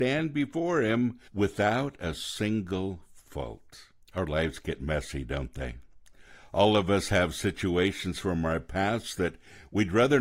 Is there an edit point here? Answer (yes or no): yes